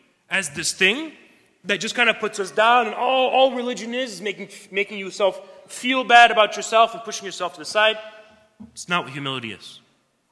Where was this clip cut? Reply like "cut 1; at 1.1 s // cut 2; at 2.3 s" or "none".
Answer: none

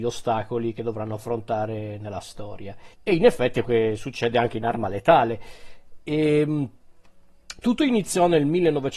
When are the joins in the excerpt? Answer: cut 1; at 2.9 s // cut 2; at 3.6 s

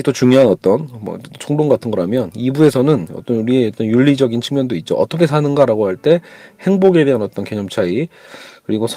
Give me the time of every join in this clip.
none

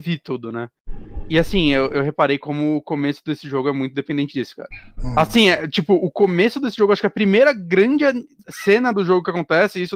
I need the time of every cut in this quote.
none

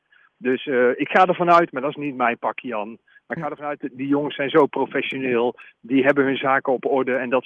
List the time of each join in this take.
none

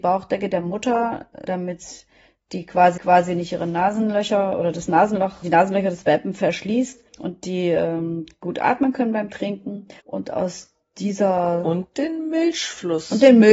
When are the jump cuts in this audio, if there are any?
cut 1; at 1.5 s // cut 2; at 3.0 s // cut 3; at 5.4 s // cut 4; at 7.1 s // cut 5; at 10.0 s

